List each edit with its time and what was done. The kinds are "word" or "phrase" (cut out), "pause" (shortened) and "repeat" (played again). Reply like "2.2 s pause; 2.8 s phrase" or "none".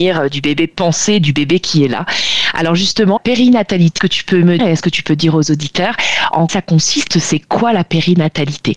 3.2 s word; 4.0 s word; 4.6 s word; 6.5 s word